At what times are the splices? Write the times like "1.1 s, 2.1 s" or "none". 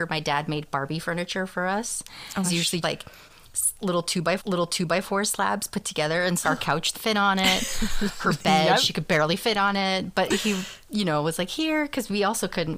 2.4 s, 2.8 s, 4.4 s, 6.4 s, 6.9 s